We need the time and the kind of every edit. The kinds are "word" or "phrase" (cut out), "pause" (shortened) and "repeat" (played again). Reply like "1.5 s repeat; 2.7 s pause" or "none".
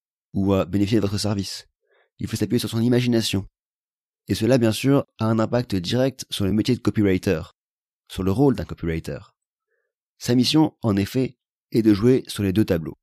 none